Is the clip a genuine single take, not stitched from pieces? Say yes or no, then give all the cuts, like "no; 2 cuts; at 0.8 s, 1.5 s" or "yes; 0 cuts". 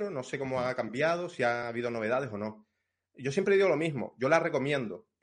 yes; 0 cuts